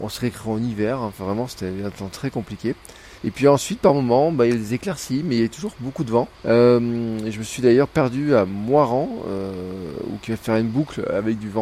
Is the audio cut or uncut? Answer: cut